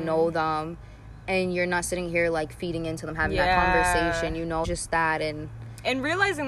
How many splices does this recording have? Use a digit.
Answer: 1